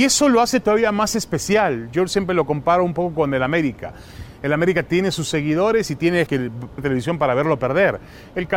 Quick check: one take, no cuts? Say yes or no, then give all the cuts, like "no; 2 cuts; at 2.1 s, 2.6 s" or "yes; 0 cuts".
no; 2 cuts; at 6.3 s, 6.8 s